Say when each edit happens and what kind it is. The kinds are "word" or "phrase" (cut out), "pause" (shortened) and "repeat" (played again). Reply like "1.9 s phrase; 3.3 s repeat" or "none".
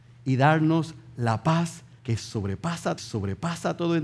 2.0 s pause; 3.0 s repeat